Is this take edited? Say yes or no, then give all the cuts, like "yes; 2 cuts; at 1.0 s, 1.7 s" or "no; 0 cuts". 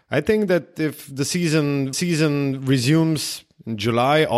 yes; 1 cut; at 1.9 s